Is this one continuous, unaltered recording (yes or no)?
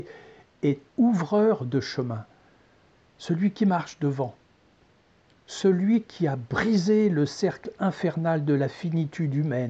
yes